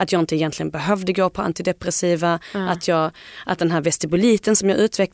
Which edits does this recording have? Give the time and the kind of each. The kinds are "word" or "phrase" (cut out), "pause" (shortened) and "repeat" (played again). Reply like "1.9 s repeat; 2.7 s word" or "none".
none